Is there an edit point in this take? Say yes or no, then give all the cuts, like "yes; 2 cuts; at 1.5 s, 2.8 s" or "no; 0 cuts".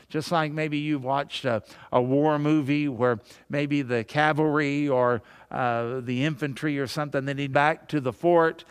yes; 1 cut; at 7.5 s